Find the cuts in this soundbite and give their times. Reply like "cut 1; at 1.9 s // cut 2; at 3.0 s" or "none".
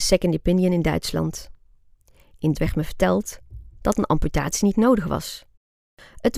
cut 1; at 2.5 s